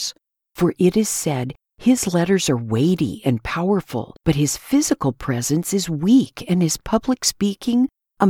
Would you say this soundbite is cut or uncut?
cut